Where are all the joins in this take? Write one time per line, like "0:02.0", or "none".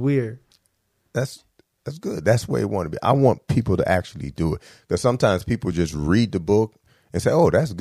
none